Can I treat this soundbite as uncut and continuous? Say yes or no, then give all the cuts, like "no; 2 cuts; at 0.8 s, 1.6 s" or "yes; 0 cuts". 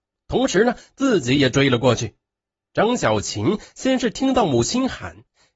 yes; 0 cuts